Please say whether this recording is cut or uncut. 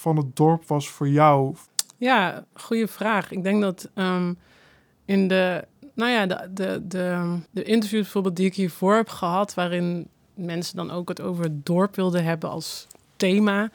cut